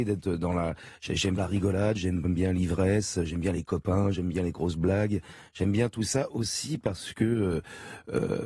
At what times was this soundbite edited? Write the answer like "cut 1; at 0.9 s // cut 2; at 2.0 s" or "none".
cut 1; at 1.4 s